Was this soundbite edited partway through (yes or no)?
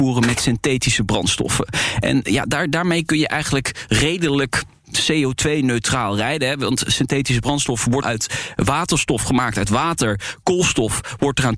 yes